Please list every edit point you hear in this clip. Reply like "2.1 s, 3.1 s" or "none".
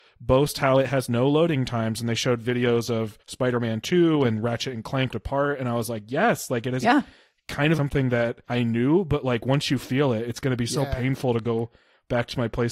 3.2 s, 5.1 s, 6.8 s, 7.7 s, 8.4 s